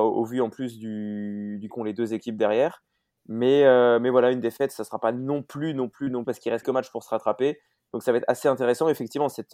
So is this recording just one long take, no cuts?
no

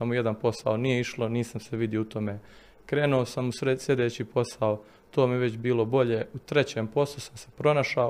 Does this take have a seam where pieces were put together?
no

